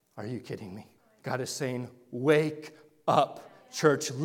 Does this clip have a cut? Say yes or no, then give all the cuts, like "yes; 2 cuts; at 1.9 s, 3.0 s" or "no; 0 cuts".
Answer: yes; 1 cut; at 1.0 s